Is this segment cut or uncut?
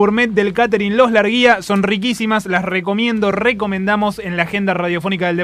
uncut